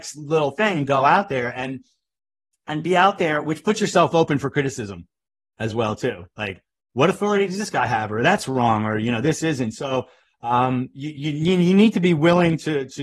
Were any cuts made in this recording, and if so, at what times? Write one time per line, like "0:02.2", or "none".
none